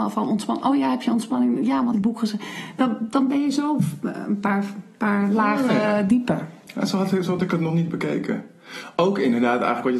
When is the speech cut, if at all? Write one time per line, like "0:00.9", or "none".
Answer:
0:01.9